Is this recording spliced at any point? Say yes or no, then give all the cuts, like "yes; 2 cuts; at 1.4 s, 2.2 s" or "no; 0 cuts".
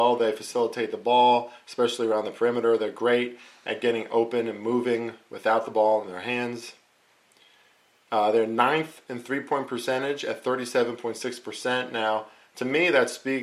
no; 0 cuts